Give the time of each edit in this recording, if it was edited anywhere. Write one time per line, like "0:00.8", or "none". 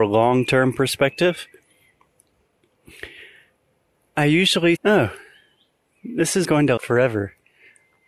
0:04.8
0:06.4
0:06.8